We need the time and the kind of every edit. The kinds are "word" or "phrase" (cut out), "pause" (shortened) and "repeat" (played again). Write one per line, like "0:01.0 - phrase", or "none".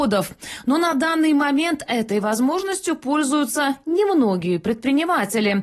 none